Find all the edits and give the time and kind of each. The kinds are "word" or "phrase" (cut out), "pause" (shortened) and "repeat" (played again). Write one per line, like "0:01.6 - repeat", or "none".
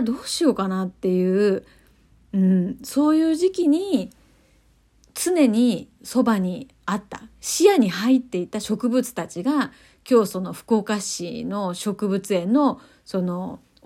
none